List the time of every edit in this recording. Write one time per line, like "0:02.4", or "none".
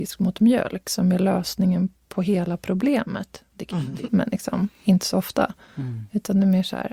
0:04.1